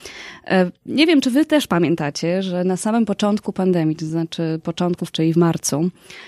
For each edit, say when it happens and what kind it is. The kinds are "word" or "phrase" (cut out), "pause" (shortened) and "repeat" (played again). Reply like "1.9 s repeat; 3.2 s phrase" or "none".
5.1 s word